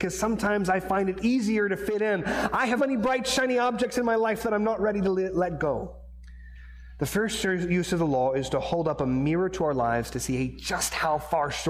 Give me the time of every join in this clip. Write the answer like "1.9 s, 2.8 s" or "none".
2.8 s